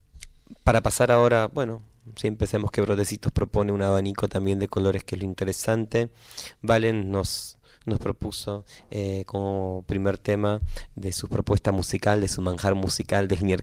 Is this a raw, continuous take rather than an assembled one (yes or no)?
yes